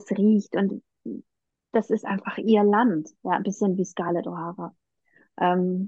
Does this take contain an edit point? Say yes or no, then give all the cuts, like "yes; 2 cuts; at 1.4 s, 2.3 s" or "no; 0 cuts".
no; 0 cuts